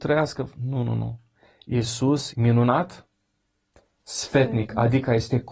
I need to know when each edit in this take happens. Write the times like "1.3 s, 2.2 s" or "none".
2.3 s